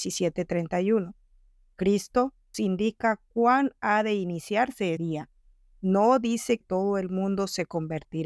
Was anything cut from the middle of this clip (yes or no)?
yes